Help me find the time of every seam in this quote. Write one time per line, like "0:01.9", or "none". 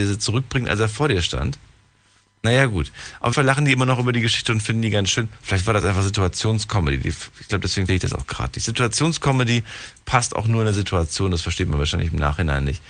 0:03.3
0:07.9